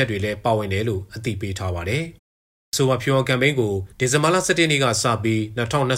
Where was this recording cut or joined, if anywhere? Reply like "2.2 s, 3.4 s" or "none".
2.2 s, 3.9 s